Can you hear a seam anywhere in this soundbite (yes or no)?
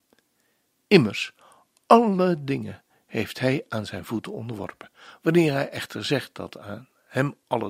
no